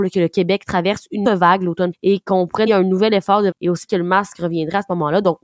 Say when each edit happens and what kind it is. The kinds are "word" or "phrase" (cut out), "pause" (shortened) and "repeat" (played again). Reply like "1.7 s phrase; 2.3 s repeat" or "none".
1.2 s word; 1.9 s word; 2.7 s word; 3.5 s word; 3.9 s word